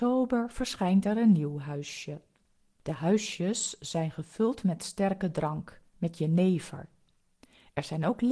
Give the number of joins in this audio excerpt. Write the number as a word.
zero